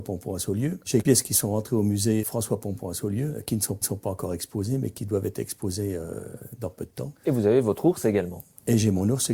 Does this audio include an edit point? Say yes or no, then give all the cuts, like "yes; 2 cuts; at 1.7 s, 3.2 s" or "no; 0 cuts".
yes; 4 cuts; at 1.0 s, 2.2 s, 3.8 s, 7.2 s